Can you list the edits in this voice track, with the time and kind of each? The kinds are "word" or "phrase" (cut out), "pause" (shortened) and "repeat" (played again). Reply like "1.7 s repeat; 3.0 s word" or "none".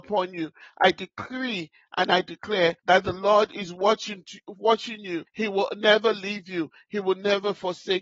2.8 s pause; 5.3 s pause